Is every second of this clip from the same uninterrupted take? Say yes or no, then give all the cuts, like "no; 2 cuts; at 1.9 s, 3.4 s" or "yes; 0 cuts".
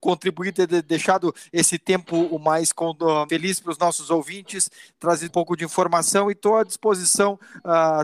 no; 2 cuts; at 3.3 s, 5.3 s